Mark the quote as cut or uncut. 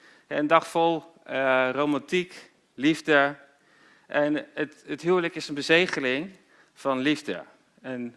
uncut